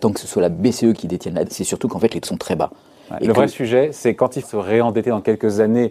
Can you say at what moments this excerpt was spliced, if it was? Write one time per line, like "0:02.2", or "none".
0:01.0
0:01.4
0:02.2
0:04.4